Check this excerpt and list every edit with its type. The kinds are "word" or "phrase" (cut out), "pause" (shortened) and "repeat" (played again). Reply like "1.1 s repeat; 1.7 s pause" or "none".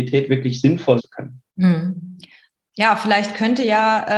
1.0 s word; 1.5 s pause